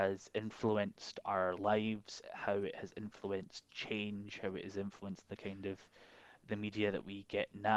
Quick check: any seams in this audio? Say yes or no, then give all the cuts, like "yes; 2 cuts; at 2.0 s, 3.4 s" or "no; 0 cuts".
no; 0 cuts